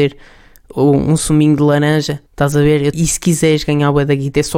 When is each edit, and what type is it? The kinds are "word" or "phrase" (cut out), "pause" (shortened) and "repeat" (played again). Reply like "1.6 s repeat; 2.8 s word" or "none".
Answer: 2.3 s pause; 2.9 s phrase